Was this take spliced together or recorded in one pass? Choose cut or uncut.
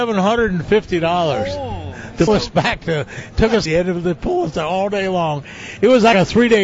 cut